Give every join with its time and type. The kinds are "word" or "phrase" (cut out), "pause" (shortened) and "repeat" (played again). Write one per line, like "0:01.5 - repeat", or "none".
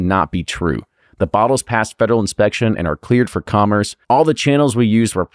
0:04.0 - pause